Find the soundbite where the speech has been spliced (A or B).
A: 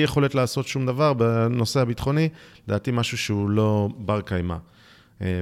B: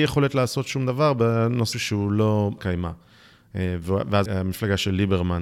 B